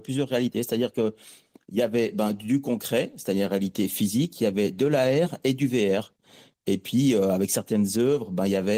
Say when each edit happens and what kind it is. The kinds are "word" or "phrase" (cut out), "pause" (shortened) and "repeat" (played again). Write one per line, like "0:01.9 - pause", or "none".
none